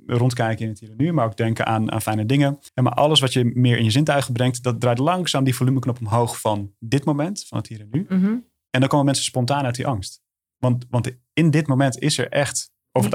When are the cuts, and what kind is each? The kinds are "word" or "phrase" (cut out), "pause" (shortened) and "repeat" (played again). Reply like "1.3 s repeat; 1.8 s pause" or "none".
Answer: 2.7 s pause